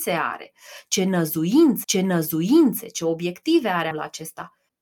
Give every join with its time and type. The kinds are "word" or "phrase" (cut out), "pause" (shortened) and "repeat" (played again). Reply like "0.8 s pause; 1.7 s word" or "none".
1.8 s repeat; 3.9 s word